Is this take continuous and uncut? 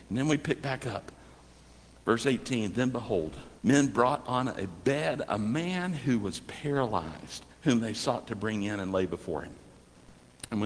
no; 2 cuts; at 3.6 s, 7.5 s

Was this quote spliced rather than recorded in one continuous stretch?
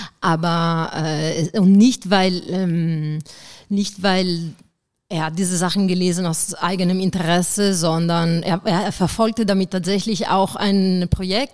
no; 0 cuts

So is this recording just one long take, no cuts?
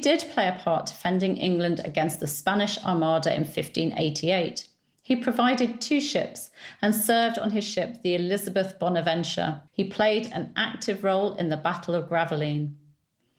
no; 1 cut; at 9.7 s

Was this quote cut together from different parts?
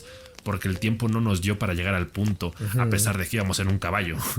no; 0 cuts

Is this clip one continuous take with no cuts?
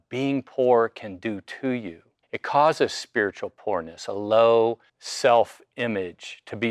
no; 2 cuts; at 2.2 s, 4.9 s

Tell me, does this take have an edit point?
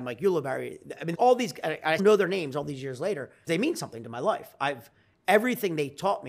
yes; 3 cuts; at 1.1 s, 2.0 s, 3.5 s

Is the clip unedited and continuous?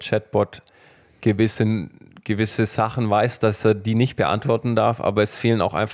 yes; 0 cuts

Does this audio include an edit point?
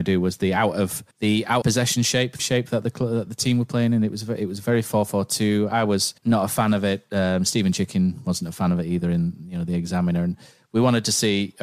yes; 4 cuts; at 1.1 s, 1.6 s, 2.4 s, 6.2 s

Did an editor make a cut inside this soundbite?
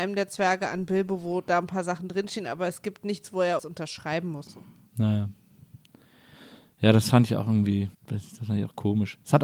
yes; 3 cuts; at 3.6 s, 4.5 s, 7.9 s

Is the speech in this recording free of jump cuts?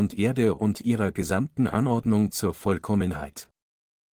yes; 0 cuts

